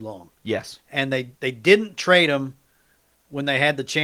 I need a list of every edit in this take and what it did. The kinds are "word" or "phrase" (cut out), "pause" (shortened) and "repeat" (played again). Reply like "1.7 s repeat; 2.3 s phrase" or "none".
1.4 s pause

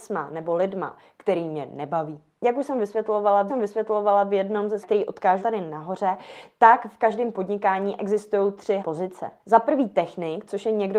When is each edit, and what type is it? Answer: 3.5 s repeat; 4.8 s phrase; 5.4 s word; 8.8 s word; 9.4 s pause

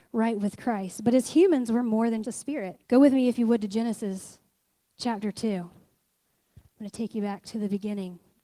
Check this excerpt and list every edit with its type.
2.2 s word; 2.8 s pause

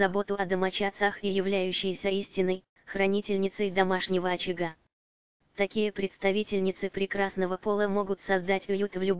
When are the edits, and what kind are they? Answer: none

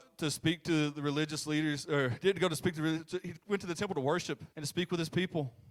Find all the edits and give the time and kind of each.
4.5 s pause

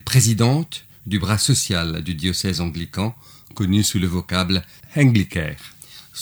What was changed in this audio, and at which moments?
none

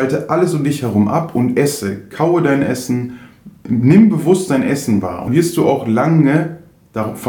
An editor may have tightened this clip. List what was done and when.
5.3 s word

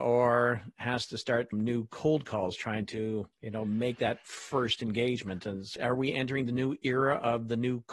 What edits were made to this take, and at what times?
1.5 s phrase; 3.3 s pause

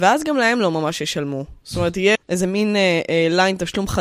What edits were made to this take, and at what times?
2.1 s word

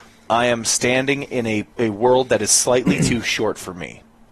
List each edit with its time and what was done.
1.7 s pause

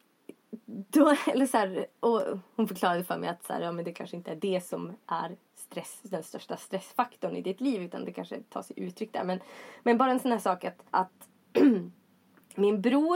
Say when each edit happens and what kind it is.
10.9 s pause

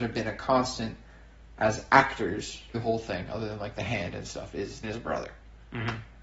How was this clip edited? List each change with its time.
2.7 s word; 4.8 s word

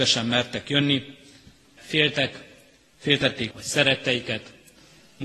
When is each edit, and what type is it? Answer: 1.8 s word; 3.5 s word

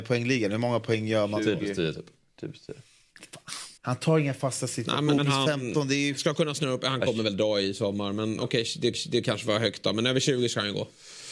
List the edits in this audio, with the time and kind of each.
3.8 s pause; 5.2 s phrase; 8.9 s repeat

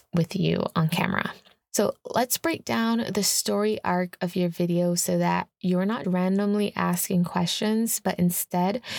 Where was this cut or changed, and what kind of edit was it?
6.0 s word

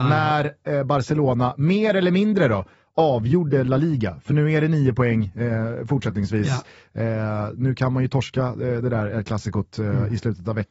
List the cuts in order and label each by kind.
none

